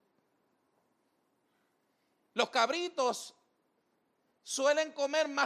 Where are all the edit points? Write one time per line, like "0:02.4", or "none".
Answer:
none